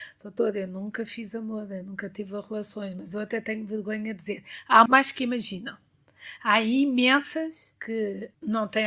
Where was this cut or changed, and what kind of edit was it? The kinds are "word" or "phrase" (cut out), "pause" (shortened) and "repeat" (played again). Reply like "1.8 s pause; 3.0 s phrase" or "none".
4.9 s word